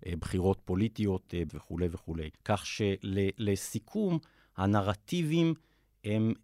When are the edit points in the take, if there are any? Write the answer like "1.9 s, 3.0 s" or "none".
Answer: 1.5 s, 2.4 s